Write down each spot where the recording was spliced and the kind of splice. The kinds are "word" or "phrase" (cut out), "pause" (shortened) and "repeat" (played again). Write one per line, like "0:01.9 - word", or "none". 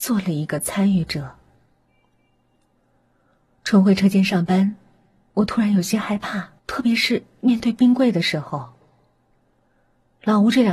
0:06.6 - pause